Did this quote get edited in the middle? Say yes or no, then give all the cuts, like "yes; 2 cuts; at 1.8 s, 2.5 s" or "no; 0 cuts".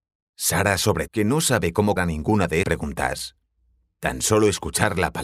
yes; 3 cuts; at 1.1 s, 2.0 s, 2.6 s